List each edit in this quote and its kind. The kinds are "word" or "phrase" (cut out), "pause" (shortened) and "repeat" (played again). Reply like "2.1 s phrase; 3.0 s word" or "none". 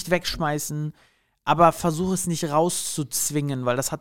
none